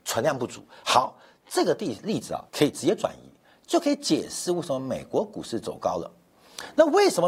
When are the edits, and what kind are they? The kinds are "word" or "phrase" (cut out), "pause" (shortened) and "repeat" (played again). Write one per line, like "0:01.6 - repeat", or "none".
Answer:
0:02.5 - pause

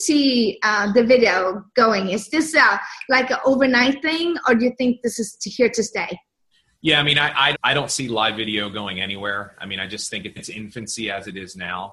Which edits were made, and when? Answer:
0:07.5 - word
0:10.4 - phrase

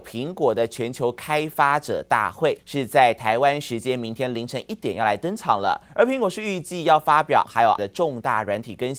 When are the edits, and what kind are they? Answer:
0:02.6 - pause
0:05.9 - pause
0:07.4 - word
0:07.8 - word

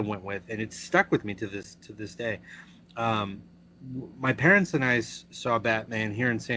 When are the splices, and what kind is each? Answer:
none

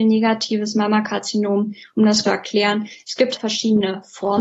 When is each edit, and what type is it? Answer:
0:02.2 - word
0:03.4 - word

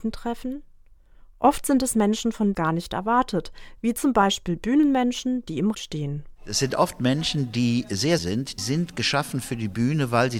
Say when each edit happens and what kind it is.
0:02.5 - phrase
0:05.7 - word
0:08.2 - word
0:08.6 - word

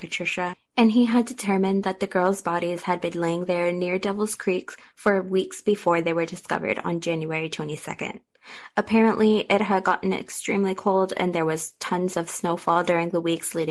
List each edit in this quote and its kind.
none

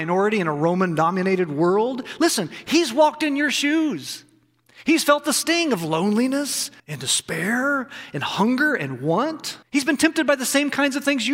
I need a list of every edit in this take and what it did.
0:06.8 - pause
0:09.6 - pause

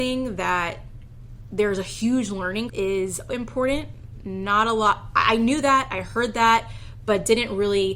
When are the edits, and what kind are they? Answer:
0:02.7 - word
0:03.3 - word

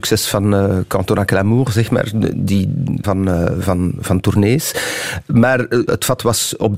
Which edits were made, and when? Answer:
0:03.0 - phrase
0:05.9 - word

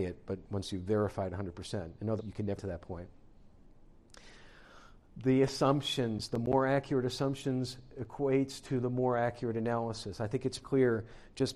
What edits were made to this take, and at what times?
0:02.2 - word
0:02.6 - word
0:10.6 - word

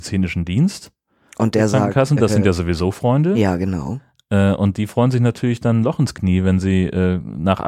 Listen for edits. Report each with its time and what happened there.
none

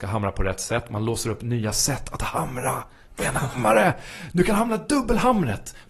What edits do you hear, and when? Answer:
none

